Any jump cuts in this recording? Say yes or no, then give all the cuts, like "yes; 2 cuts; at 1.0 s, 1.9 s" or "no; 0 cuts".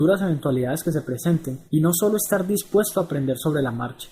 yes; 1 cut; at 1.7 s